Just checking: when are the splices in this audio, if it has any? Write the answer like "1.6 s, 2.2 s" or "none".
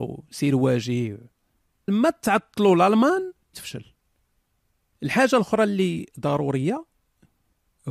1.9 s, 3.5 s